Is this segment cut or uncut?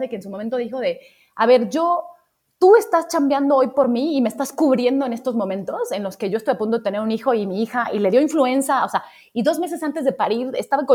uncut